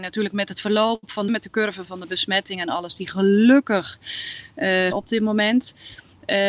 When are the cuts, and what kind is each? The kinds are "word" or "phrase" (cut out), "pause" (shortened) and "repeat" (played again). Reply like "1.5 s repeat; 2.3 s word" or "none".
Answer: 1.3 s phrase; 1.8 s word; 4.9 s phrase